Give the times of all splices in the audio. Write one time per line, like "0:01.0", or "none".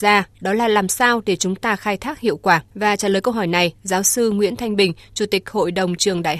0:02.7